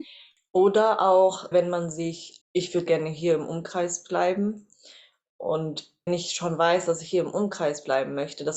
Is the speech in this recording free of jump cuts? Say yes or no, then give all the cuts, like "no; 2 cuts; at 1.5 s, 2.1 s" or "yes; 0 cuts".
no; 4 cuts; at 1.5 s, 2.4 s, 2.9 s, 6.1 s